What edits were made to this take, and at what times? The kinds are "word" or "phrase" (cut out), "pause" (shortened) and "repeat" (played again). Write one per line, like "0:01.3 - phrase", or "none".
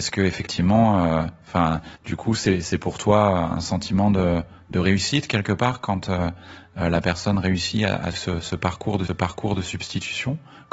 0:02.0 - pause
0:08.1 - word
0:09.1 - repeat